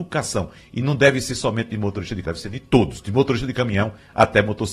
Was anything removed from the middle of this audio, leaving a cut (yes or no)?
yes